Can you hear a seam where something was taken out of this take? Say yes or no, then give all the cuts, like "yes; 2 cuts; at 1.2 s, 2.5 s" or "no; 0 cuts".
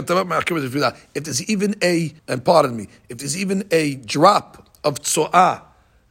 yes; 1 cut; at 2.2 s